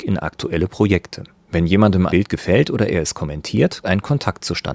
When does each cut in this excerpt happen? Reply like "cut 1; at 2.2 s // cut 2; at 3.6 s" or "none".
cut 1; at 1.3 s // cut 2; at 2.1 s // cut 3; at 3.8 s